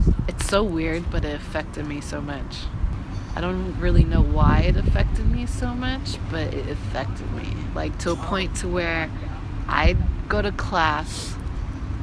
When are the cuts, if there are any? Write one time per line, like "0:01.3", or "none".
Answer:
none